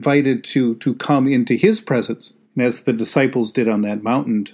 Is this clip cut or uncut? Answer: cut